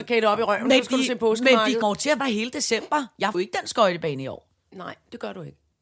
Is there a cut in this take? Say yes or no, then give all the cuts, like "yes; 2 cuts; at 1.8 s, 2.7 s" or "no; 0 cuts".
yes; 3 cuts; at 1.8 s, 2.2 s, 3.3 s